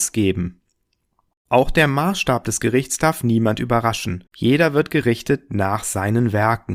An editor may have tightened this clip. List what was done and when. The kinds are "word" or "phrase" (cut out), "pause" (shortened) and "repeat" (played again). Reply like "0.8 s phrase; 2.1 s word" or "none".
4.3 s pause